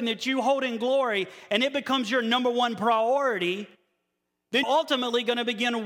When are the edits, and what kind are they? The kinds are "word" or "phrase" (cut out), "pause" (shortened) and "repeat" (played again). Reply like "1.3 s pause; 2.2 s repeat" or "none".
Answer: 4.6 s word